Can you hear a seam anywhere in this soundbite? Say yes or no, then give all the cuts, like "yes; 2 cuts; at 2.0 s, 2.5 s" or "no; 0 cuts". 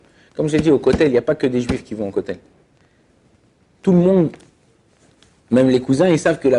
no; 0 cuts